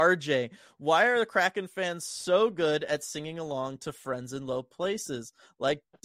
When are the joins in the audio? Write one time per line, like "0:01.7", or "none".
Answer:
none